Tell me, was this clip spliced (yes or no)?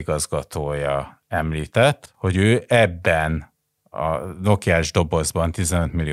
no